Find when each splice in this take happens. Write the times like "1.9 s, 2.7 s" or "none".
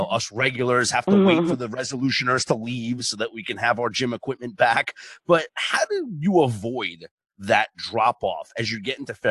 none